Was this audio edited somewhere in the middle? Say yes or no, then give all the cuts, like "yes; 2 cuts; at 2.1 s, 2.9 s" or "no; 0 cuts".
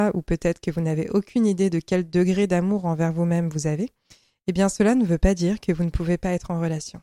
no; 0 cuts